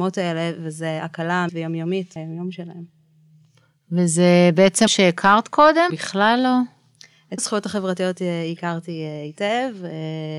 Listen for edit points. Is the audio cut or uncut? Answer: cut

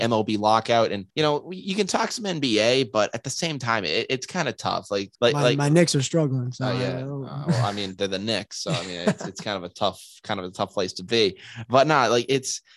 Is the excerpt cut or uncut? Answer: cut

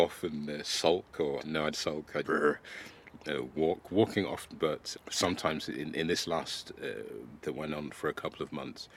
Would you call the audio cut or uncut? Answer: cut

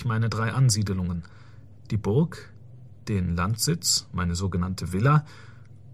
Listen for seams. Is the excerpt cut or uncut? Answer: uncut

